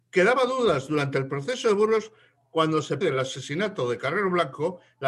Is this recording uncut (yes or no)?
no